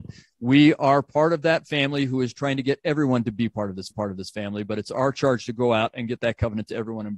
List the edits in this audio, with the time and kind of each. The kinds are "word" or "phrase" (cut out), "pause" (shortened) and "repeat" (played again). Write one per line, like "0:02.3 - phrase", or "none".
0:03.9 - repeat